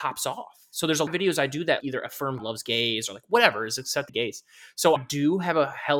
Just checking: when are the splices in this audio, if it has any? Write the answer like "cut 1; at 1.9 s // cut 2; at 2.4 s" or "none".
cut 1; at 1.1 s // cut 2; at 1.8 s // cut 3; at 2.4 s // cut 4; at 4.1 s // cut 5; at 5.0 s